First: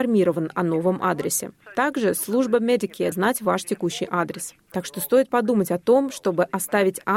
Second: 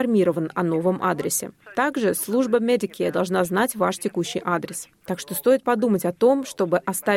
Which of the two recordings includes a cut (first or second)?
first